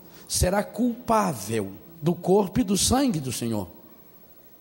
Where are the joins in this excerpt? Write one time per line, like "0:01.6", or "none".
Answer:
0:01.9